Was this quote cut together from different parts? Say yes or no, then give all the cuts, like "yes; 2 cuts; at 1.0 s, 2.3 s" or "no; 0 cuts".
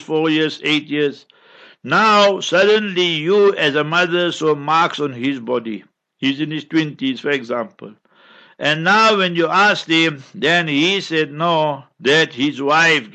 no; 0 cuts